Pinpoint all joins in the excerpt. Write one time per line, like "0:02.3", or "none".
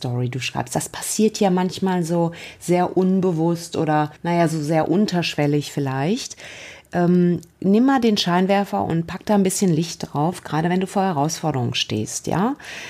0:04.2
0:07.5